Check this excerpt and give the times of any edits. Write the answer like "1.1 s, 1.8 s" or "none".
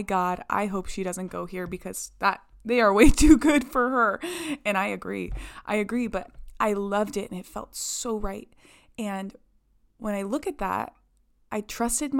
none